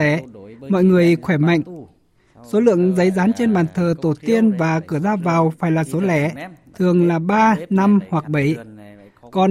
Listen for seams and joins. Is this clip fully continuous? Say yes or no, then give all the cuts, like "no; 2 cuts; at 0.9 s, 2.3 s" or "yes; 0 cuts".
yes; 0 cuts